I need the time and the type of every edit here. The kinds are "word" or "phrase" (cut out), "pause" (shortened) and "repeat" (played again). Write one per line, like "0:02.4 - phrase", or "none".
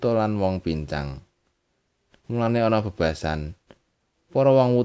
none